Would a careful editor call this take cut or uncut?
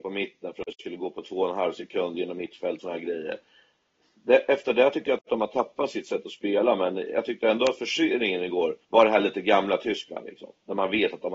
cut